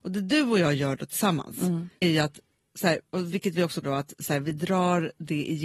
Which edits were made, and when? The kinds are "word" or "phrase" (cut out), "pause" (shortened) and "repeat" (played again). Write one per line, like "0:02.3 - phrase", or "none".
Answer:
0:02.0 - word
0:03.8 - word